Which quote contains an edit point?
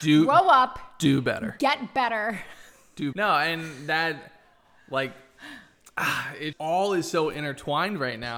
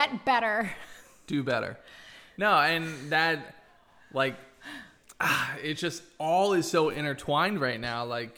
first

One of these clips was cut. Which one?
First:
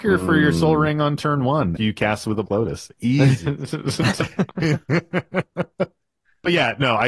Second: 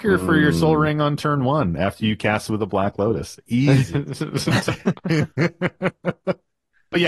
first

